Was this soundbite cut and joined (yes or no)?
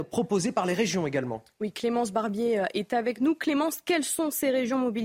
no